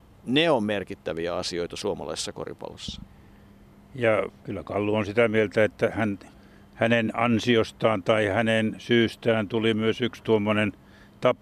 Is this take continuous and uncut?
yes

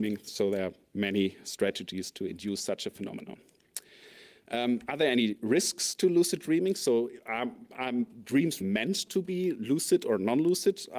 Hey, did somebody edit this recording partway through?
yes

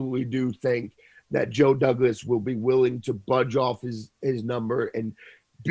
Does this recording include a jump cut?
no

